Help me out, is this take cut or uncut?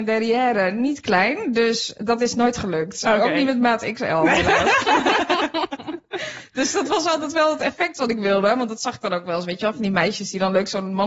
uncut